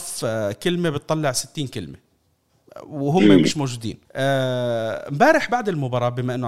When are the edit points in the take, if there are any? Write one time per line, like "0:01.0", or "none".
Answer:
0:04.0